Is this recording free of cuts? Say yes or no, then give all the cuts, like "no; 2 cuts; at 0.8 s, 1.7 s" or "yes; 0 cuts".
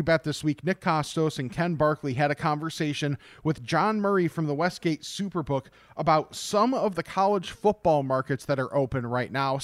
yes; 0 cuts